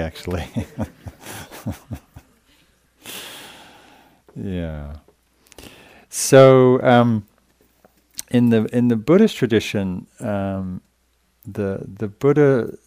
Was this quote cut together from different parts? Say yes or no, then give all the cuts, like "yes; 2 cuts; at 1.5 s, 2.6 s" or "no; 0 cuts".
no; 0 cuts